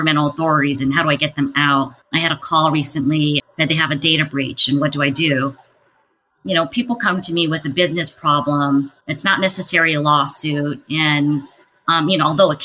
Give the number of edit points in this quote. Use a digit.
3